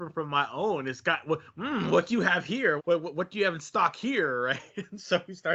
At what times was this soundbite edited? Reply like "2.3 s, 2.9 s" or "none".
2.8 s